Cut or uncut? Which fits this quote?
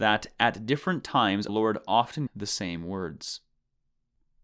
cut